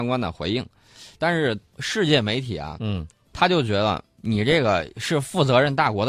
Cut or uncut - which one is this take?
cut